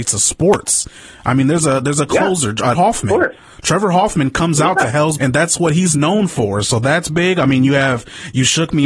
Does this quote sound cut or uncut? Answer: cut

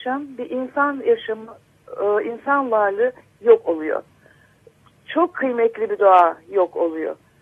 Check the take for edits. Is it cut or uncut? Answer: uncut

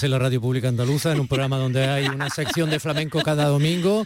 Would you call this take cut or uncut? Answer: uncut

